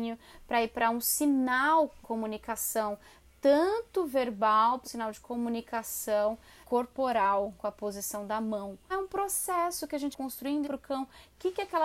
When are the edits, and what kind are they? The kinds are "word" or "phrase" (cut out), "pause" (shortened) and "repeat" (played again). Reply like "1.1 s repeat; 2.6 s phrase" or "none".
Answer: 2.0 s word; 4.8 s word; 6.6 s word; 7.6 s word; 8.9 s word; 10.1 s word; 10.6 s word